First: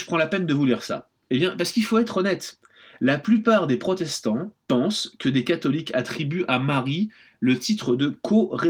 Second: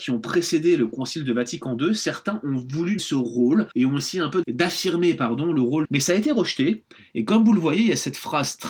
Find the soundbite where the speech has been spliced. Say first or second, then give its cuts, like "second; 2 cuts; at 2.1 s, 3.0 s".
second; 4 cuts; at 3.0 s, 3.7 s, 4.4 s, 5.8 s